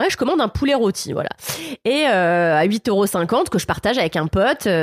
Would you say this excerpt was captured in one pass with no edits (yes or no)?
yes